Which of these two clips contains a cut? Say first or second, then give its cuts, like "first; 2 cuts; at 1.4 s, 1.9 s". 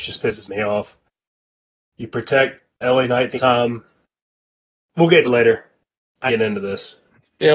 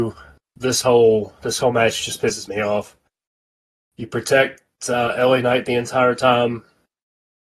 first; 4 cuts; at 2.8 s, 3.3 s, 5.2 s, 6.3 s